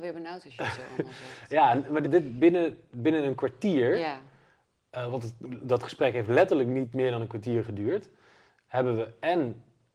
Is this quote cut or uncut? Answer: cut